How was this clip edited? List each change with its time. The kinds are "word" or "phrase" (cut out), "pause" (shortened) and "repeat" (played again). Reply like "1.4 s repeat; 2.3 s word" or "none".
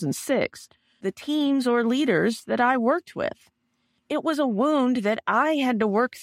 1.0 s phrase